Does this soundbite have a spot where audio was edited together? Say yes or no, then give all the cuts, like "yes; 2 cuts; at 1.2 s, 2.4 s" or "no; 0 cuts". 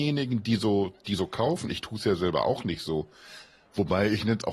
no; 0 cuts